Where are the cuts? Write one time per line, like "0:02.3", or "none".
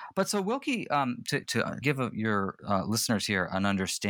0:01.4
0:01.8

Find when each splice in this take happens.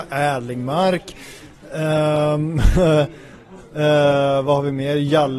none

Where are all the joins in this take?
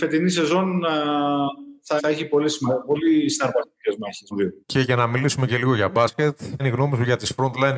0:02.0
0:04.3
0:04.6
0:06.6

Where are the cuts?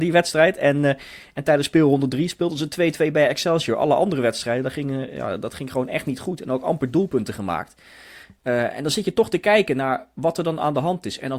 none

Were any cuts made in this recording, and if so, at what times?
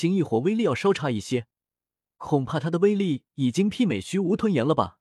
none

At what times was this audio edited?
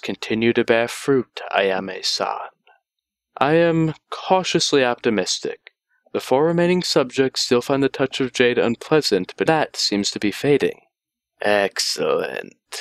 0:09.5

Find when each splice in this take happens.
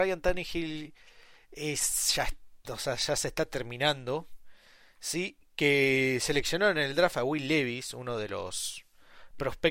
none

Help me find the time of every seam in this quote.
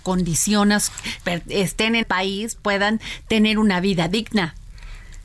0:01.2
0:02.0
0:02.5

